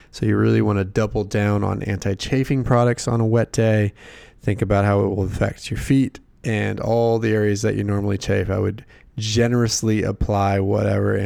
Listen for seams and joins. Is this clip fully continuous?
yes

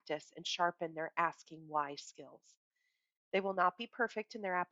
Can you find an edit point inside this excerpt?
no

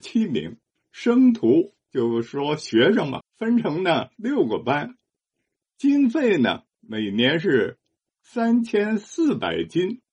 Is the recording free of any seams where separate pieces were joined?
no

